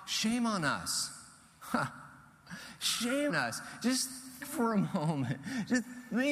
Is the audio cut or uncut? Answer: cut